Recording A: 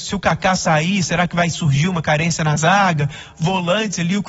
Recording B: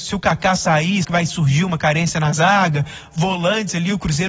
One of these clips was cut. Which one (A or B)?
B